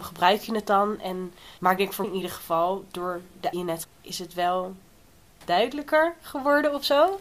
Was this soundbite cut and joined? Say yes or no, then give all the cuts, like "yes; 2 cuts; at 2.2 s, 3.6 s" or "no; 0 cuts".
yes; 4 cuts; at 1.6 s, 2.0 s, 3.5 s, 3.8 s